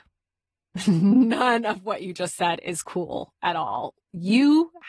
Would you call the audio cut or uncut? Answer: uncut